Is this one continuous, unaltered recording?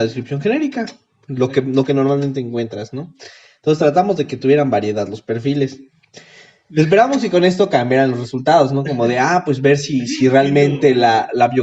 yes; 0 cuts

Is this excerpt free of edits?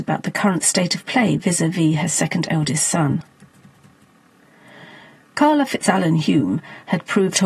yes; 0 cuts

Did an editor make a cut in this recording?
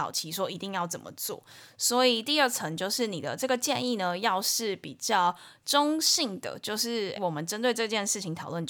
yes; 1 cut; at 7.2 s

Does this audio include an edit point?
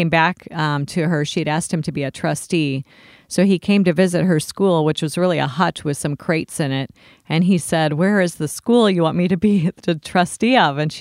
no; 0 cuts

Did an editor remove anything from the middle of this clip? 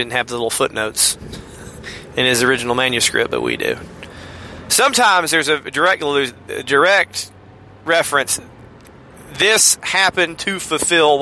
no; 0 cuts

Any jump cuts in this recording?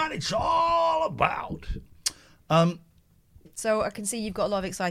no; 0 cuts

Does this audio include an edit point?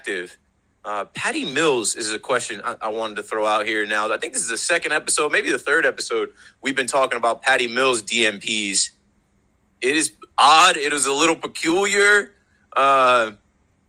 no; 0 cuts

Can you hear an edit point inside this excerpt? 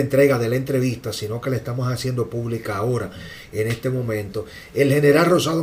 no; 0 cuts

